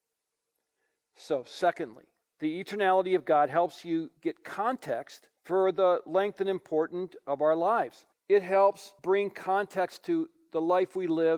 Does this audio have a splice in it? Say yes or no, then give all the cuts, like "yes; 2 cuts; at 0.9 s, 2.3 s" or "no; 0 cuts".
yes; 5 cuts; at 2.2 s, 4.2 s, 5.4 s, 8.1 s, 9.0 s